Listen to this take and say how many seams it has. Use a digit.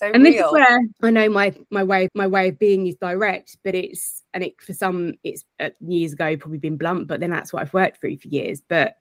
3